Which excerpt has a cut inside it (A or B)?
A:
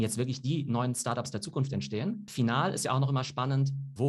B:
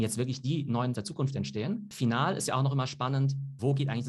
B